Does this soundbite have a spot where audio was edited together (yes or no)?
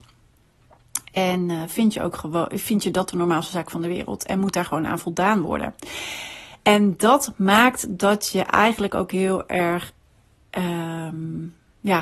no